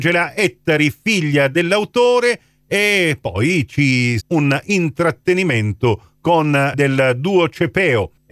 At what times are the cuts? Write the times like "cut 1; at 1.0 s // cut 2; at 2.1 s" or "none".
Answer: cut 1; at 4.2 s // cut 2; at 6.7 s